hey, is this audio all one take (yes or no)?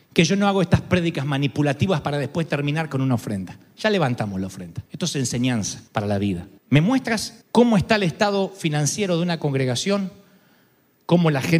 no